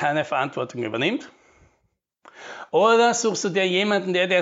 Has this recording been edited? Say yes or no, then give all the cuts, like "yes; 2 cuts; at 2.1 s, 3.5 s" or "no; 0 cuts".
no; 0 cuts